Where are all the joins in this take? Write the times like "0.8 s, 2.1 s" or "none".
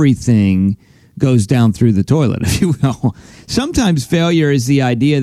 none